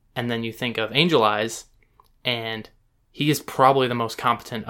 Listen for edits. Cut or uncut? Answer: uncut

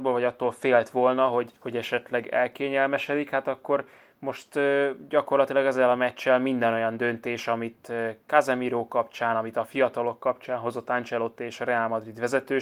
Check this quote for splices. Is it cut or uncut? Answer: cut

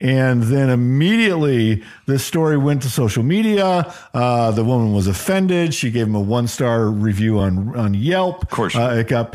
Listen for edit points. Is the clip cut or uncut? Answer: uncut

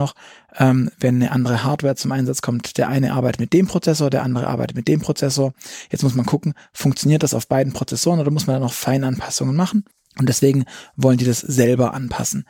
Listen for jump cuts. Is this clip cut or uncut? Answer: cut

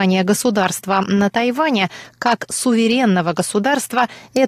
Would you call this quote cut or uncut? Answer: uncut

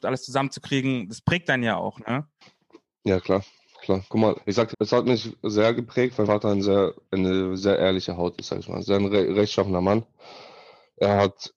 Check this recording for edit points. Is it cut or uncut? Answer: cut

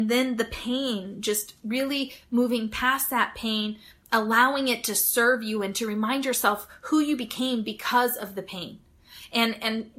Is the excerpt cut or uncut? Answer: uncut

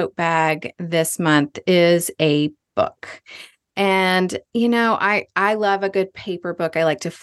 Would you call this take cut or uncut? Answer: cut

